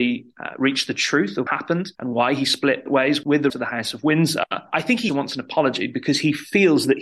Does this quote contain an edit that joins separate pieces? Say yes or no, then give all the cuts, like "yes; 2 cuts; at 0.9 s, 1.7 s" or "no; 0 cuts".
yes; 4 cuts; at 1.5 s, 2.0 s, 3.5 s, 5.1 s